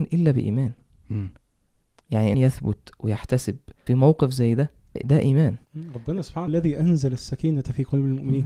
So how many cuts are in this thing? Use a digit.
5